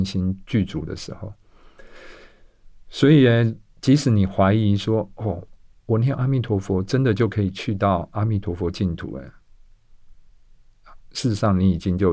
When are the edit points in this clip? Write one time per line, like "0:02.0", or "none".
none